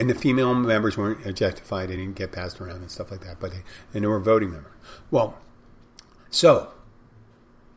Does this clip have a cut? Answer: no; 0 cuts

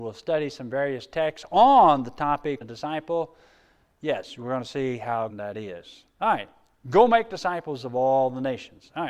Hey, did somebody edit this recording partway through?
yes; 2 cuts; at 2.6 s, 5.3 s

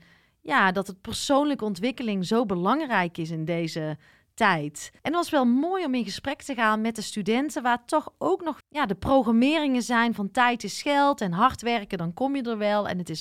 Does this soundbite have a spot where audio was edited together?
yes; 2 cuts; at 5.0 s, 8.6 s

